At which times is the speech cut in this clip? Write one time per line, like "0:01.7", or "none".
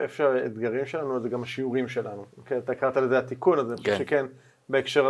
0:02.3